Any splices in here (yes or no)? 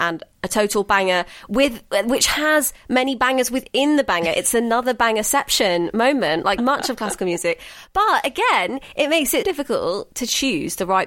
yes